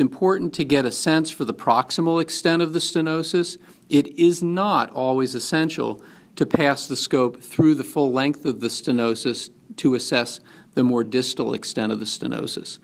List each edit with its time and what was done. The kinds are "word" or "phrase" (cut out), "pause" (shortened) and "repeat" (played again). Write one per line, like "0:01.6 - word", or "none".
none